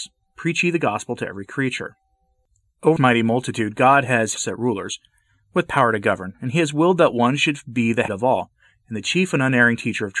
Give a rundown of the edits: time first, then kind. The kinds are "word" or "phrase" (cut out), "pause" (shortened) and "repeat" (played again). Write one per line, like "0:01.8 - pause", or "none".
0:03.0 - word
0:04.4 - word
0:08.1 - word